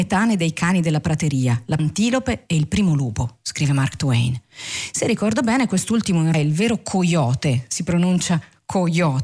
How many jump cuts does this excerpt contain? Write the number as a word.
two